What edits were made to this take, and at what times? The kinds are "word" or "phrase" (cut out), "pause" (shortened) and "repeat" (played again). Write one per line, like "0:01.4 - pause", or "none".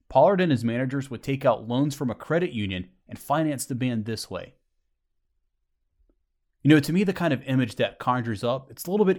none